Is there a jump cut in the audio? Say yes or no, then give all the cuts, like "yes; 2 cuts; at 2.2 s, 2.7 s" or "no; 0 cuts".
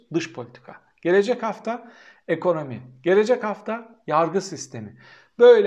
no; 0 cuts